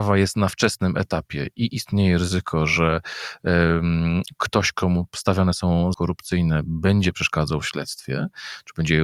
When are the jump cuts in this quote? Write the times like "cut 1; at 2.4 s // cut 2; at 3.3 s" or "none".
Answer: cut 1; at 5.9 s